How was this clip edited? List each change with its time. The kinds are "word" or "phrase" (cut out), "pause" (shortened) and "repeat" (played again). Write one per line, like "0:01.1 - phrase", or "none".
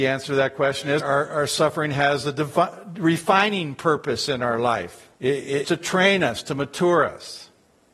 0:01.0 - word
0:05.1 - pause
0:05.6 - word